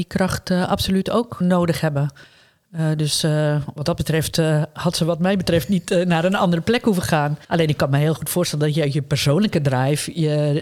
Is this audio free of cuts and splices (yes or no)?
no